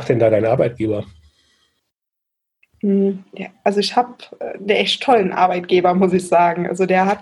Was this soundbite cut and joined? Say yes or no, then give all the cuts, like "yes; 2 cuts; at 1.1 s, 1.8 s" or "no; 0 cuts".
no; 0 cuts